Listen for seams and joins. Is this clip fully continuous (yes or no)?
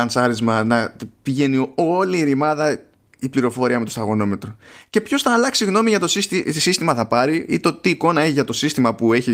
yes